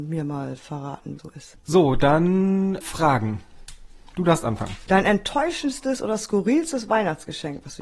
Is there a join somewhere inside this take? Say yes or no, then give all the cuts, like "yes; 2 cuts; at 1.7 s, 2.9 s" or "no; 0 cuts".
yes; 1 cut; at 1.2 s